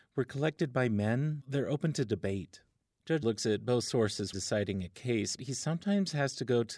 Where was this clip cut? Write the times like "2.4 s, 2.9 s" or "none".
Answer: 1.4 s, 3.2 s, 4.3 s, 5.4 s